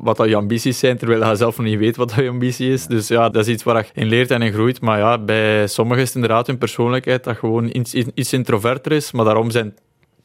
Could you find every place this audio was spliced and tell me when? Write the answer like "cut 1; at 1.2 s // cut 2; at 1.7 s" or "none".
cut 1; at 3.3 s // cut 2; at 3.9 s